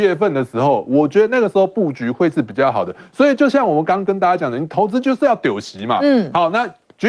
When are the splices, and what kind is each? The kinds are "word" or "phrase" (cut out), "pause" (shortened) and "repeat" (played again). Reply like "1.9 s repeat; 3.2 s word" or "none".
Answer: none